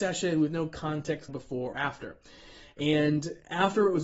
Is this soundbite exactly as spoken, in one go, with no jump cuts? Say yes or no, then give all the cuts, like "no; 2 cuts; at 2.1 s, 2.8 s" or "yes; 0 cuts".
no; 2 cuts; at 1.3 s, 1.7 s